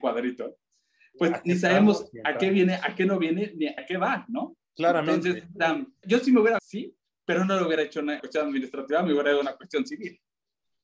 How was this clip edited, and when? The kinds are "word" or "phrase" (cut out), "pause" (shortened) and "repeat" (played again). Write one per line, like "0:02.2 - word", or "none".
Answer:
0:03.8 - word
0:04.6 - pause
0:06.0 - word
0:06.6 - phrase
0:08.2 - word

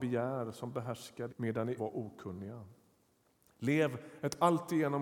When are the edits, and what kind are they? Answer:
0:01.3 - word
0:01.8 - word

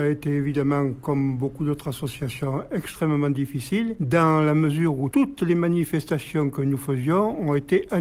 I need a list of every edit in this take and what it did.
none

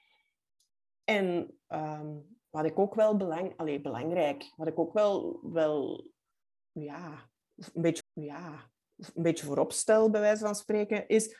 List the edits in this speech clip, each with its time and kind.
0:02.4 - pause
0:08.0 - repeat

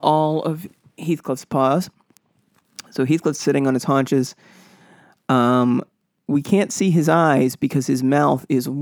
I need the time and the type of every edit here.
none

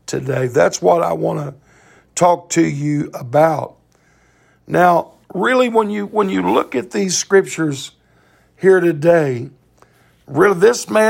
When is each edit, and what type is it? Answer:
0:05.2 - pause

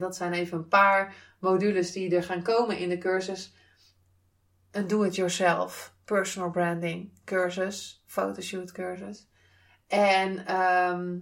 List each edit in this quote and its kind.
none

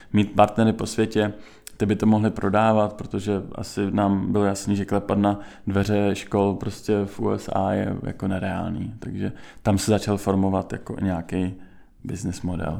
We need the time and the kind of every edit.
none

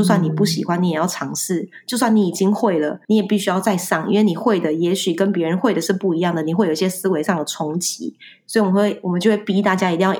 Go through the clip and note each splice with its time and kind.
0:03.0 - pause

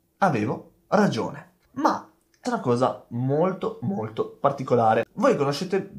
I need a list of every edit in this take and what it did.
0:01.6 - pause
0:02.4 - word

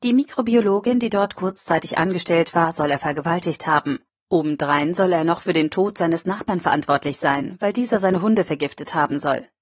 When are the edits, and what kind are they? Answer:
0:04.1 - pause

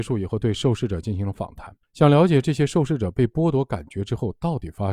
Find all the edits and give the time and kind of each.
0:01.8 - pause

